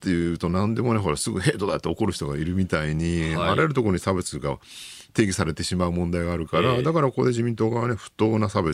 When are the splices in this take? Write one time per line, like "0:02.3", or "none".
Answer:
0:05.1